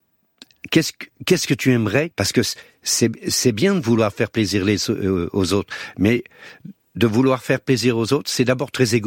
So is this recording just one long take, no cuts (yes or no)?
no